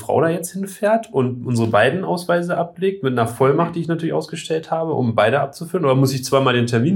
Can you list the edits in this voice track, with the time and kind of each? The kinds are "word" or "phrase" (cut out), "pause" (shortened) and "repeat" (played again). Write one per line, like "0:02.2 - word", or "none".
none